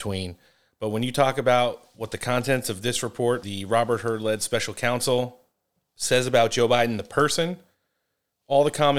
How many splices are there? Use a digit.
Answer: 1